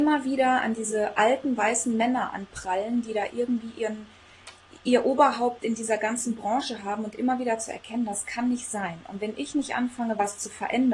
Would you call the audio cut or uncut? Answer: cut